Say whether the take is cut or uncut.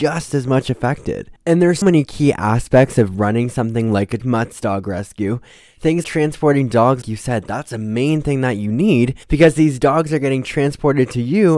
cut